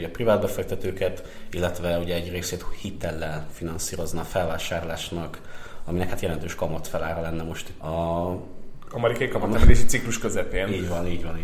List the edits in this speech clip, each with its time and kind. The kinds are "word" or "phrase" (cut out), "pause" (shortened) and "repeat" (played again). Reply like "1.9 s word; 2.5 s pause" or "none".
7.8 s word